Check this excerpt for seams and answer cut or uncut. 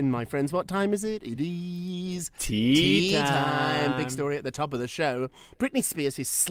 uncut